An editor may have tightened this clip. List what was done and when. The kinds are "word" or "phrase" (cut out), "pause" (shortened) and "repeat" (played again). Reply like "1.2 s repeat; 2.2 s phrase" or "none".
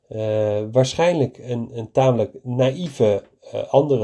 none